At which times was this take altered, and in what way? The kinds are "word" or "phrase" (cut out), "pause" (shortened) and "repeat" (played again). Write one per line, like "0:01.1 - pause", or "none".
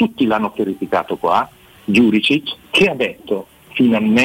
0:02.6 - pause